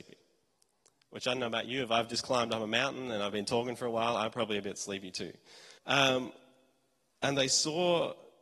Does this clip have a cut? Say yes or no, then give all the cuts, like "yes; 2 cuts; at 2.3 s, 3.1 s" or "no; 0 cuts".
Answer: yes; 1 cut; at 5.8 s